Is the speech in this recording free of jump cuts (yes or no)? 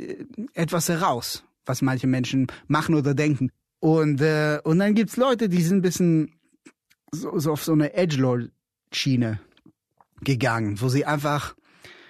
yes